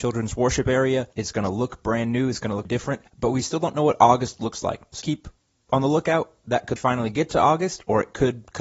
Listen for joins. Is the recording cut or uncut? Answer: cut